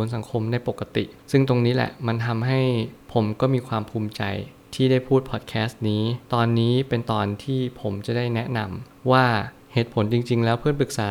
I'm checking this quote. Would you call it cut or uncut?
cut